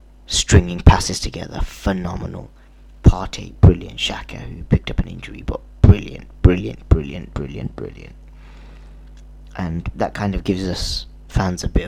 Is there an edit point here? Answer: no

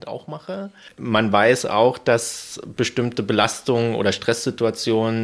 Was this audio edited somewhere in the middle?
no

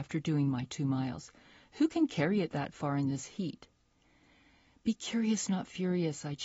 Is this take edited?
no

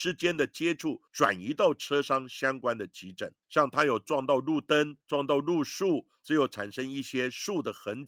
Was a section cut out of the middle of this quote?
yes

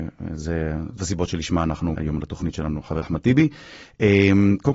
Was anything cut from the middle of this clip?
yes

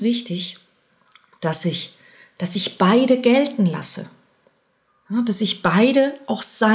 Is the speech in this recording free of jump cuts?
yes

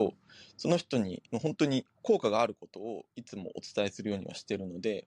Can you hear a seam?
yes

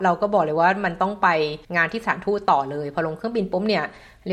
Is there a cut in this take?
yes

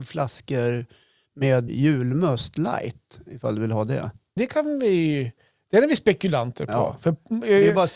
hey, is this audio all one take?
no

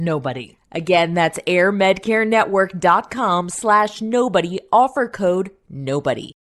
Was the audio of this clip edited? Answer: no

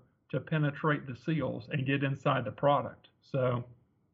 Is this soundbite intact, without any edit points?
yes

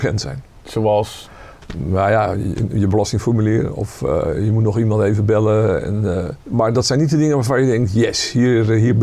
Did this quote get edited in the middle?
yes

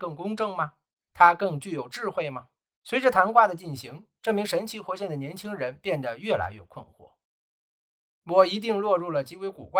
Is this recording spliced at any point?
yes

